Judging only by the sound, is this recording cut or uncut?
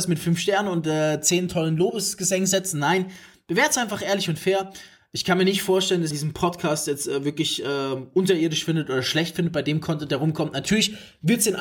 cut